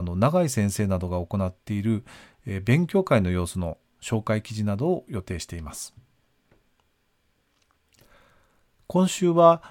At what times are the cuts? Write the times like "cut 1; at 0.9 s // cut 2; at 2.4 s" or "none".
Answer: none